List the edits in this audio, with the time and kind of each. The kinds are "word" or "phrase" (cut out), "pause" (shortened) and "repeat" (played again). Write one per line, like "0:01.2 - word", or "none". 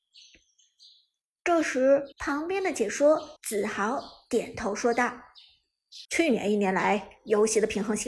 0:02.1 - pause
0:03.4 - pause
0:06.0 - pause